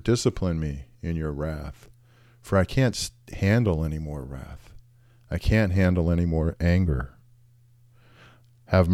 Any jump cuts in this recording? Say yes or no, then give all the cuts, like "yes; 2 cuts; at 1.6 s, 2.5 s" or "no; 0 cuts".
no; 0 cuts